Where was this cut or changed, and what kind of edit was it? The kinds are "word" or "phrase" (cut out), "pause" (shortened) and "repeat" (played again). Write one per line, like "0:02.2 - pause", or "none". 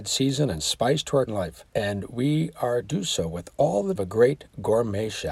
0:01.3 - word
0:01.7 - pause
0:02.8 - word
0:04.0 - phrase